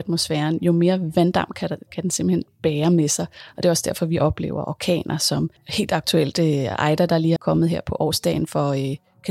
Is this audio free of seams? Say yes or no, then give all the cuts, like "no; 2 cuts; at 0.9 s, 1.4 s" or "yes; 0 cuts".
no; 2 cuts; at 5.6 s, 7.4 s